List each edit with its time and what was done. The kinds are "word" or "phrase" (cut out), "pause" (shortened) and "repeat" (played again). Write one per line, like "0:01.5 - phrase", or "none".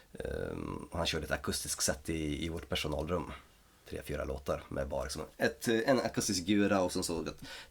none